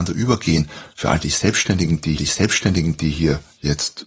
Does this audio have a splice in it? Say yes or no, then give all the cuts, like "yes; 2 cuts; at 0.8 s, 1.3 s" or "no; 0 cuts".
yes; 1 cut; at 2.2 s